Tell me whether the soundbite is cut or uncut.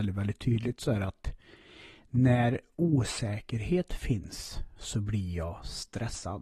uncut